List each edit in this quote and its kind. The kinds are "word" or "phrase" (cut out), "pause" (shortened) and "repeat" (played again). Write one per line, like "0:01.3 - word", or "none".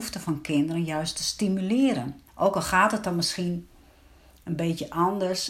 0:02.3 - pause